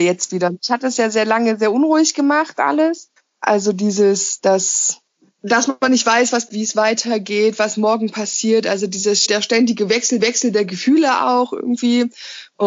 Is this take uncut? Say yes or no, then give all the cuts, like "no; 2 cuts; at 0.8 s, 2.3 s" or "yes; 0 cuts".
no; 5 cuts; at 3.2 s, 5.1 s, 6.5 s, 9.3 s, 10.2 s